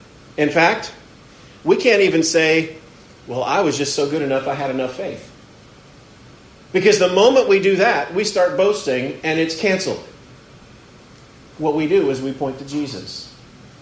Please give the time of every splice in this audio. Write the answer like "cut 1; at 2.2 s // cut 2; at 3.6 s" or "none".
none